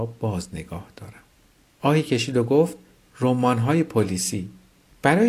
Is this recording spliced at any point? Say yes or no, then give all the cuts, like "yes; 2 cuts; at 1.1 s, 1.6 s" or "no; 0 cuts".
no; 0 cuts